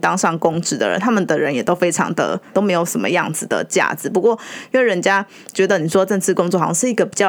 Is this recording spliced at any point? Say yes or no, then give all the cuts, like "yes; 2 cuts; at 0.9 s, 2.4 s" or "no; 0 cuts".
yes; 1 cut; at 2.5 s